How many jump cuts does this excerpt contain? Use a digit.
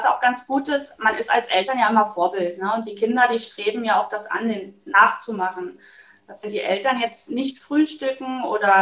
1